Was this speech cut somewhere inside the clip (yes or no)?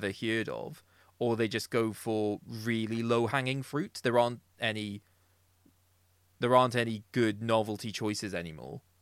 no